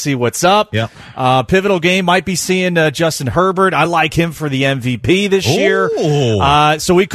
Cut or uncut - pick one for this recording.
uncut